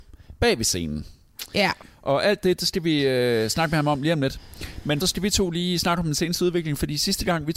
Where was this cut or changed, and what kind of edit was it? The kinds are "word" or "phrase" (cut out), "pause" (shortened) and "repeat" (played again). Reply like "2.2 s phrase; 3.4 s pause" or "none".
5.0 s phrase